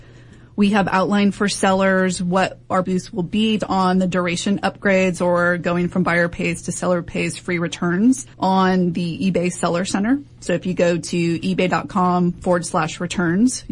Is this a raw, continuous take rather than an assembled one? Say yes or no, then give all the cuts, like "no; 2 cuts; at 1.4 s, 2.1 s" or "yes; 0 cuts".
no; 3 cuts; at 2.8 s, 3.6 s, 8.3 s